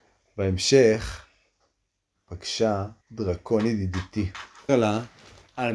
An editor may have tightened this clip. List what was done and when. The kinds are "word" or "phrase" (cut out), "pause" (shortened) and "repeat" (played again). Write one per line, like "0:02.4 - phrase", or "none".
0:03.0 - pause
0:04.7 - word